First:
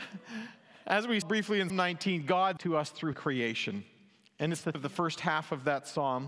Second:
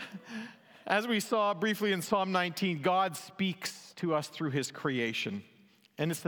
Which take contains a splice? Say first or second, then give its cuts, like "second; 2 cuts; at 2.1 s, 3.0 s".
first; 5 cuts; at 1.2 s, 1.7 s, 2.6 s, 3.1 s, 4.7 s